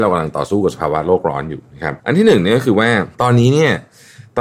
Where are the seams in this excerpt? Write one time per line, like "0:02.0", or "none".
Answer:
0:02.0
0:03.1